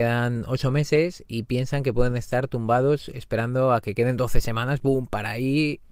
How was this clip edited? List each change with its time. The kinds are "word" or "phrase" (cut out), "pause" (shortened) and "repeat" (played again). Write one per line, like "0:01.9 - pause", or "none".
none